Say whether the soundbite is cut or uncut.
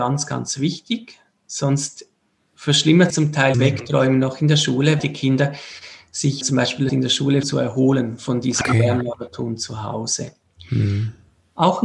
cut